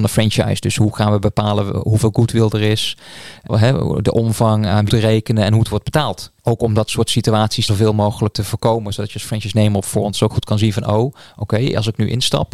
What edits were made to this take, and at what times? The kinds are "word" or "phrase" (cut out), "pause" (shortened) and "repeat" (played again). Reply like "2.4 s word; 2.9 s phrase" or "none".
3.5 s word; 4.9 s phrase; 6.4 s pause; 7.7 s word; 8.3 s word; 10.3 s word